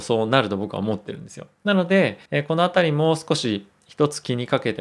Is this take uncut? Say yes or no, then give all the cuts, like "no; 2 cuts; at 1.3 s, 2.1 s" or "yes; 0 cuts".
no; 2 cuts; at 1.5 s, 2.3 s